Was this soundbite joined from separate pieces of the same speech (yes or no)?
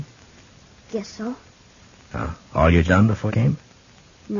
yes